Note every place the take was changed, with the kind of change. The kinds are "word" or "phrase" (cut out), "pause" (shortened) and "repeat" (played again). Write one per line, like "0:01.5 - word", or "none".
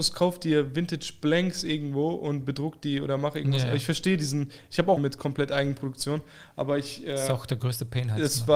0:05.0 - word